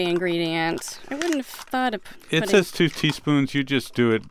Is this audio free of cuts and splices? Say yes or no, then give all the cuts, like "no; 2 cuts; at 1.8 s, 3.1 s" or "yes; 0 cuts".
yes; 0 cuts